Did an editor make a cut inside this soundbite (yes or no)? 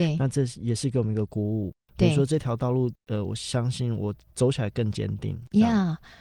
no